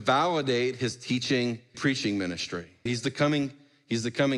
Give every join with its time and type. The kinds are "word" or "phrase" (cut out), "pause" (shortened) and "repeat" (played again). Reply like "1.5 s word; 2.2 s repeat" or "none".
1.7 s word; 2.9 s word